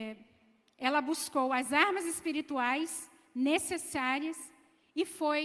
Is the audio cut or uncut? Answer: uncut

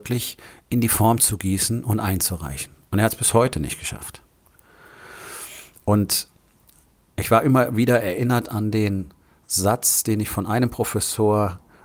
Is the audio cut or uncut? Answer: uncut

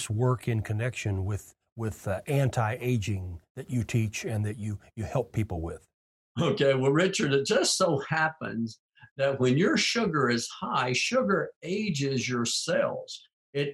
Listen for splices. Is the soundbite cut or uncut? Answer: uncut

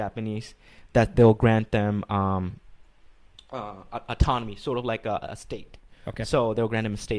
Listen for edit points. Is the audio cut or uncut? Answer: uncut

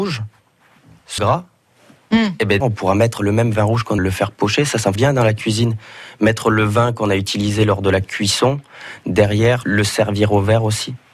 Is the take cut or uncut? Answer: cut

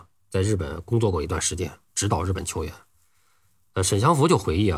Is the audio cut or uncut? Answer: uncut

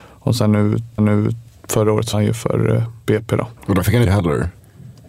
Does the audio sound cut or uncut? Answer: cut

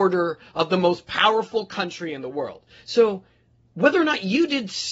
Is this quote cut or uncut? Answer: uncut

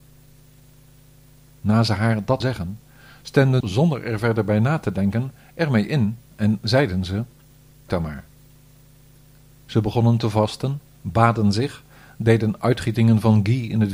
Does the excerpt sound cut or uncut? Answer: cut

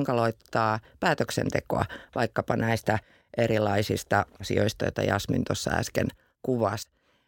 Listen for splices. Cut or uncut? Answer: uncut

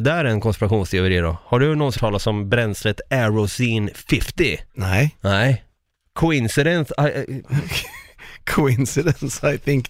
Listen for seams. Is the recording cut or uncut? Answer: cut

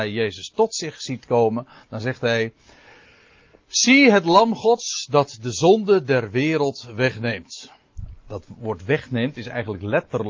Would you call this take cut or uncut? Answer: uncut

